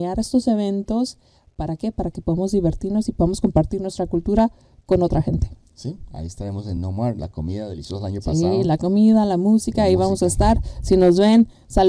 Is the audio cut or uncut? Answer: uncut